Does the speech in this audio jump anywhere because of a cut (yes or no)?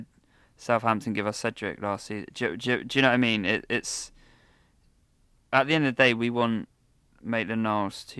no